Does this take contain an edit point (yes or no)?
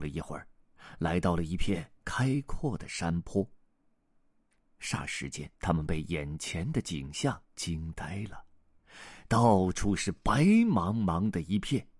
yes